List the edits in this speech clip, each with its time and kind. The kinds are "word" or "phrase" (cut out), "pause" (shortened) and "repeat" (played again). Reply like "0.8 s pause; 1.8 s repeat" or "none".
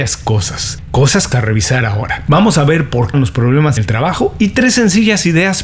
1.3 s word; 3.1 s phrase; 3.8 s word

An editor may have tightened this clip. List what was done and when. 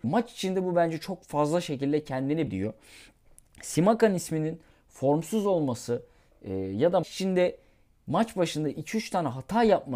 2.5 s word; 7.0 s word

